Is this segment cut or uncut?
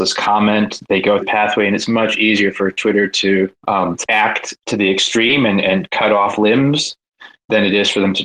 cut